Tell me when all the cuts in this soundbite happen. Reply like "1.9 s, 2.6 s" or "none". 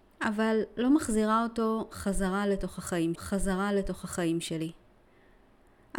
3.1 s